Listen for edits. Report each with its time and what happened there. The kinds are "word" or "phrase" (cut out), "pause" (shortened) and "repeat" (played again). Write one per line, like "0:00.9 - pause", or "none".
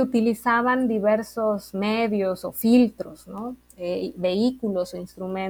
none